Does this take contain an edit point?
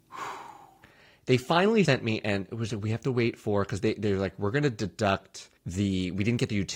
yes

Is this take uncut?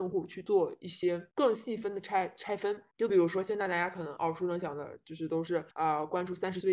no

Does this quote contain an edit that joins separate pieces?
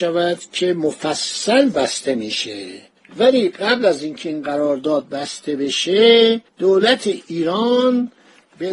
yes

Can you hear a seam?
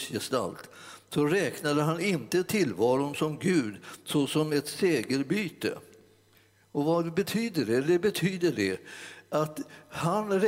no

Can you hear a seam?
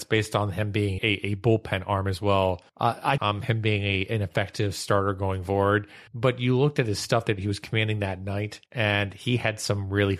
yes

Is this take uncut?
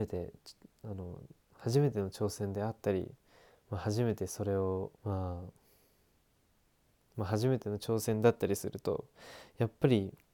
no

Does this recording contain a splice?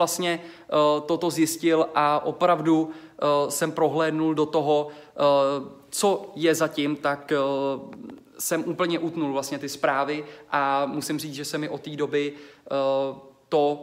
no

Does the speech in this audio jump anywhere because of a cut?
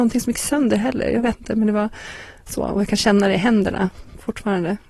no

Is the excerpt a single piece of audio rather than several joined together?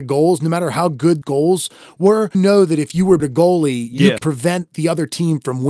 no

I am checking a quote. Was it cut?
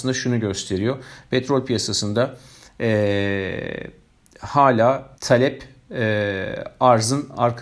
yes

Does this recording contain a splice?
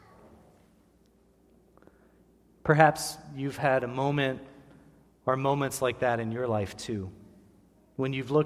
no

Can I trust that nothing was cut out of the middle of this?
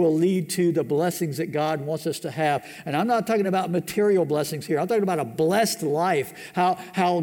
yes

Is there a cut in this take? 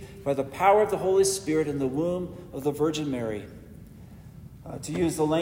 no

